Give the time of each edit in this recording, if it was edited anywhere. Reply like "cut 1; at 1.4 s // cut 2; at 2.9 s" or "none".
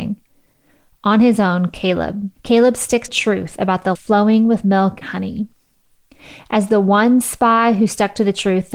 cut 1; at 2.4 s // cut 2; at 3.1 s // cut 3; at 4.0 s // cut 4; at 5.0 s